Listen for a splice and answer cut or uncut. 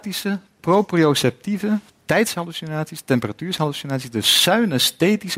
cut